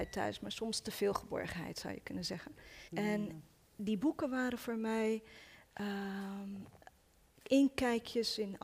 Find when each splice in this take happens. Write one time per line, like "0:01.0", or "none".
0:02.9
0:07.3

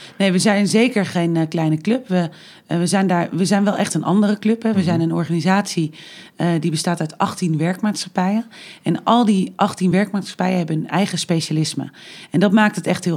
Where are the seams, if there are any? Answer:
none

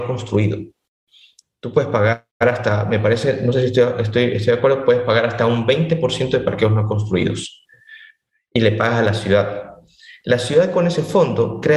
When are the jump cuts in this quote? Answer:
none

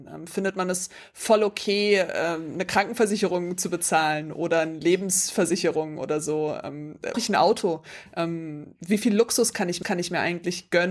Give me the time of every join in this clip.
0:07.1
0:09.8

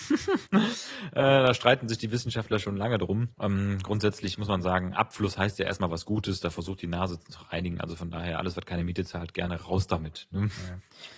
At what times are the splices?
0:03.3

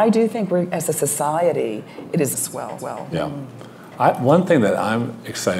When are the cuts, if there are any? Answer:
0:02.3
0:02.8

